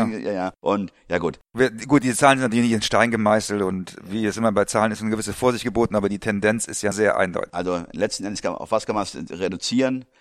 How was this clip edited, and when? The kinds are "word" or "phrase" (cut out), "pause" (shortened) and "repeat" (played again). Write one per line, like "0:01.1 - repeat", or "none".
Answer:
0:06.9 - phrase